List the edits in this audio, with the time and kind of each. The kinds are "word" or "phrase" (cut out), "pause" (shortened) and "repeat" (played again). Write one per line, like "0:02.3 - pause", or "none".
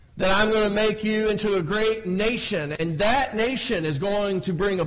none